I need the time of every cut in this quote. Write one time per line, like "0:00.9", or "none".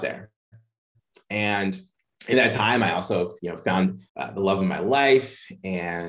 0:03.4
0:04.1